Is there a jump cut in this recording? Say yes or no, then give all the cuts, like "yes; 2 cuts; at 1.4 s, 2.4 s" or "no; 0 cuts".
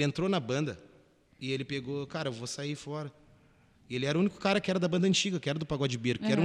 no; 0 cuts